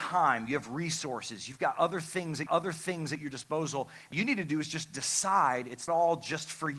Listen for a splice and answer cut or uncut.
cut